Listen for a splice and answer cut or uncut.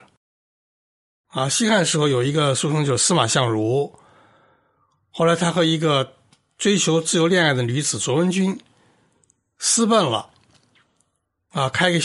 uncut